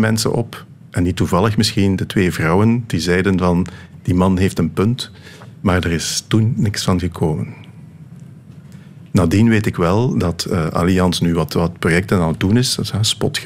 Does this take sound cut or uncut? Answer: uncut